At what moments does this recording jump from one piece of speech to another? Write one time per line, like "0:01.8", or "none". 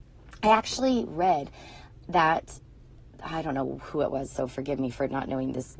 none